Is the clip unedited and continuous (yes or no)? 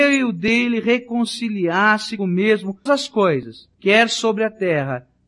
no